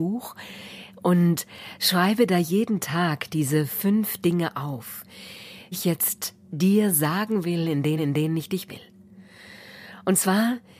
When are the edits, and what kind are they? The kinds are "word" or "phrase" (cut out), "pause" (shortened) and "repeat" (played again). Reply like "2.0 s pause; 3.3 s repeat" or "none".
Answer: 5.7 s word; 8.0 s repeat; 8.7 s word